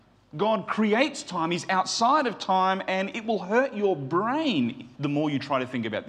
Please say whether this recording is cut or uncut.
cut